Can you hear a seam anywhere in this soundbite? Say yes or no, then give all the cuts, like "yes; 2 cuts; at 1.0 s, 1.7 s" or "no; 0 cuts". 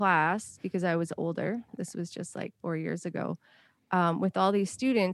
no; 0 cuts